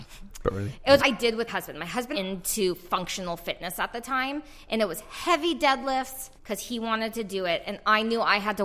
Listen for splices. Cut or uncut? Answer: cut